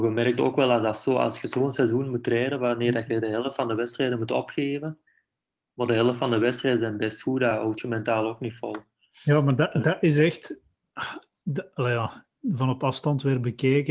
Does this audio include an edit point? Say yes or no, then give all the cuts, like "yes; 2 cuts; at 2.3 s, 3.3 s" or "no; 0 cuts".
no; 0 cuts